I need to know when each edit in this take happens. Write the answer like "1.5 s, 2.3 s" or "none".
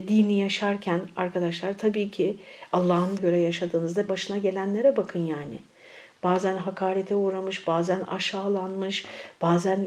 3.2 s, 4.1 s